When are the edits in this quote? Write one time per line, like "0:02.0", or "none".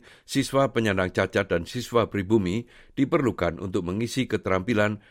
none